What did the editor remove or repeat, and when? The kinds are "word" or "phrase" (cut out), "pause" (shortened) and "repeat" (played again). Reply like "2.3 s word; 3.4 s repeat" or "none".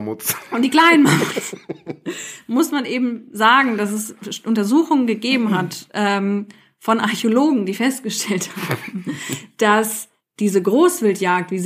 none